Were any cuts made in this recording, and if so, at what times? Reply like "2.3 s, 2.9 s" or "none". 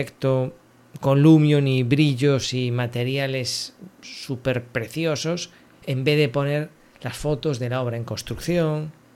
none